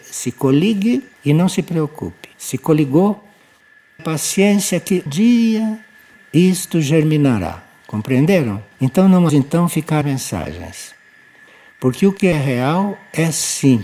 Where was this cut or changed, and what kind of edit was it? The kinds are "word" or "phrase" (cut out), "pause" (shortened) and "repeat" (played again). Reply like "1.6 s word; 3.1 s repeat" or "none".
1.1 s pause; 2.3 s pause; 4.0 s word; 5.1 s word; 8.7 s pause; 9.3 s phrase; 10.0 s phrase